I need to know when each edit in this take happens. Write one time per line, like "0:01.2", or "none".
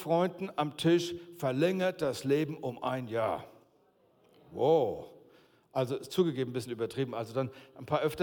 none